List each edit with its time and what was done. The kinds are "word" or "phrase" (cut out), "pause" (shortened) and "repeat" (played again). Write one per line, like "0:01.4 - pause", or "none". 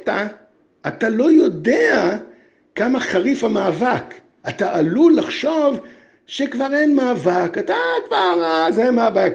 none